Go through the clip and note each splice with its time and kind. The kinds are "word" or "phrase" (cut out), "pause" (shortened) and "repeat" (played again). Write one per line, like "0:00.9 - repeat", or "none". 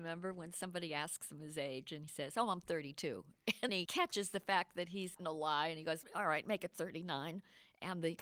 0:02.1 - word
0:03.7 - word
0:05.2 - word
0:06.0 - word